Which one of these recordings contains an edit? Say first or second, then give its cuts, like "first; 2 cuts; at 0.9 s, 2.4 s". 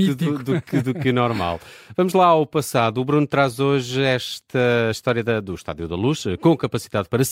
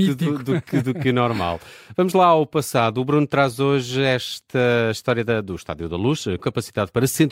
second; 1 cut; at 6.4 s